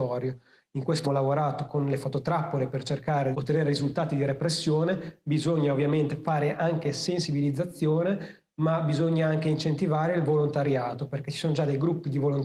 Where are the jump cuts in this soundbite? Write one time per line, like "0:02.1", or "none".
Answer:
0:01.0
0:03.3